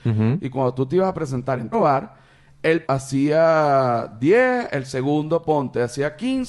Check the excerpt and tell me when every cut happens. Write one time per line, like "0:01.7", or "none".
0:01.7
0:02.8